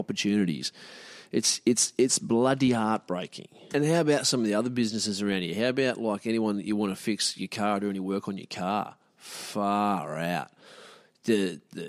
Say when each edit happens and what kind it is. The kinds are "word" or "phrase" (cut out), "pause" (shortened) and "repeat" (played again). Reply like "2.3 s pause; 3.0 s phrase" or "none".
none